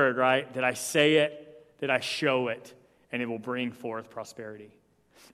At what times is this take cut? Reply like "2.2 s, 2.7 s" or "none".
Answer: none